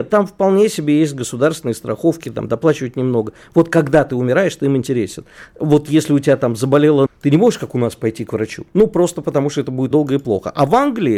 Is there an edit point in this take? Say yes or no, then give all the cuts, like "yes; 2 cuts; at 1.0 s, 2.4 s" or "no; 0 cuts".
yes; 3 cuts; at 7.1 s, 8.7 s, 9.9 s